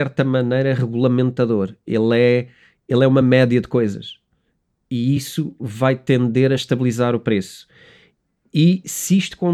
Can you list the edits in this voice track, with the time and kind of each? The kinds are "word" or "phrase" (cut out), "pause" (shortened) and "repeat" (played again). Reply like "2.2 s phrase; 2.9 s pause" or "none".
none